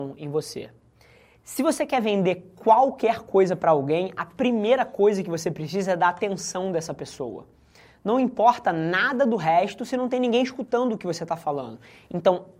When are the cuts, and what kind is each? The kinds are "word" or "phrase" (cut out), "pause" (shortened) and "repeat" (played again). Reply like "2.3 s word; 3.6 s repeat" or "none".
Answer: none